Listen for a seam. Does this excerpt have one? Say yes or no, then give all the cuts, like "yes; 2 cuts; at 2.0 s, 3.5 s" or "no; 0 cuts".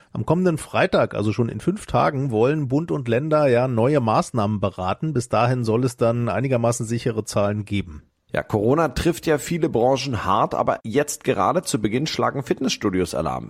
no; 0 cuts